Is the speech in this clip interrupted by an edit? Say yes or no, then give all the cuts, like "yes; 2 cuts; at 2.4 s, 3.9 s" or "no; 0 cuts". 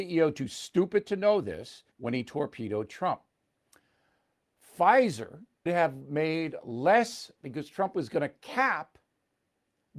yes; 3 cuts; at 1.9 s, 5.7 s, 7.4 s